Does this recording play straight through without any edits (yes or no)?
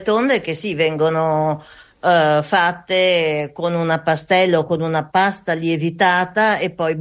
yes